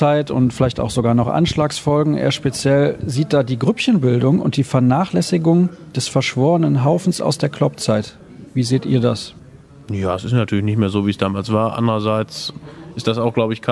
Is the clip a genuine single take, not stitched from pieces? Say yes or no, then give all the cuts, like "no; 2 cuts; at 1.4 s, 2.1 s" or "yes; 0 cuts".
yes; 0 cuts